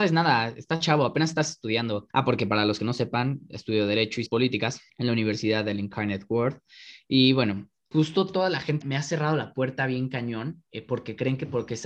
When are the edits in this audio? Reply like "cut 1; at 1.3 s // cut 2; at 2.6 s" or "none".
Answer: cut 1; at 2.1 s // cut 2; at 4.3 s // cut 3; at 4.9 s // cut 4; at 7.9 s // cut 5; at 8.8 s // cut 6; at 10.7 s